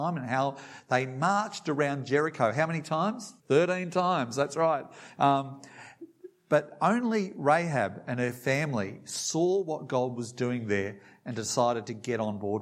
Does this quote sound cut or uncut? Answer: cut